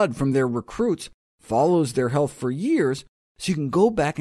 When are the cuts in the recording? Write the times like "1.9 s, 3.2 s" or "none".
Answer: none